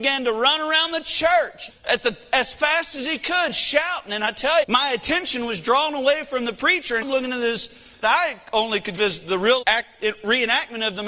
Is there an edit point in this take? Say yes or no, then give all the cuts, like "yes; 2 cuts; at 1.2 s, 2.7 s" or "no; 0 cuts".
yes; 6 cuts; at 1.7 s, 4.6 s, 7.0 s, 8.0 s, 9.0 s, 9.6 s